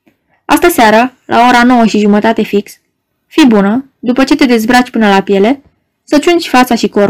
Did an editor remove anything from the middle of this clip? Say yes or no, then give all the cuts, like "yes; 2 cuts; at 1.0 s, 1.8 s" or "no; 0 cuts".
no; 0 cuts